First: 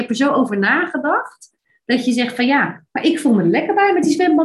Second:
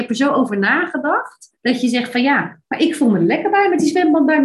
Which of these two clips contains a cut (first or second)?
second